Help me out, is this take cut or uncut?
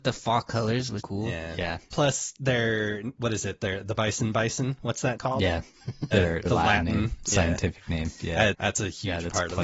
cut